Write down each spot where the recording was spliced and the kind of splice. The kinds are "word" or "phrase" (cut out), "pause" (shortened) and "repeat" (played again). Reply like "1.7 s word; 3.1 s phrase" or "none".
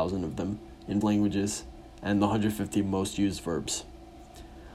1.0 s word

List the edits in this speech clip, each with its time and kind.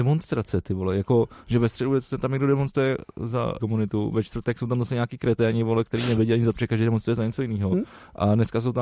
3.6 s word; 6.6 s word

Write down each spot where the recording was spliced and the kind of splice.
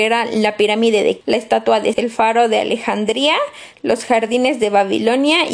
1.2 s word; 1.9 s word

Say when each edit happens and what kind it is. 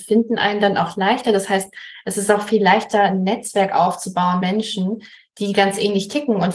4.4 s word

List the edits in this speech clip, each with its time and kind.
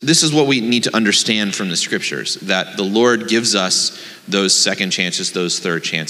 none

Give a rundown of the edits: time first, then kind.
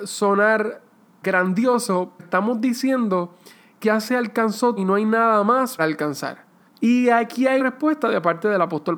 1.2 s word; 2.2 s word; 3.8 s word; 4.8 s word; 5.8 s word; 6.7 s pause; 7.6 s word

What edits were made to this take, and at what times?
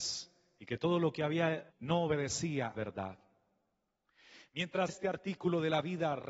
1.7 s word; 2.7 s word; 4.9 s word

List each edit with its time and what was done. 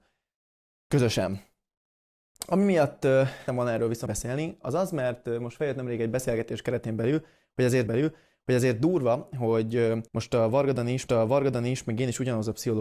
3.5 s word; 4.1 s word; 7.9 s repeat; 10.1 s pause; 11.1 s repeat

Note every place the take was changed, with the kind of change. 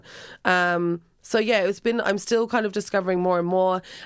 none

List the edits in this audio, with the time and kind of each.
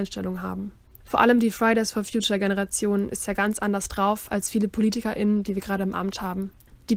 none

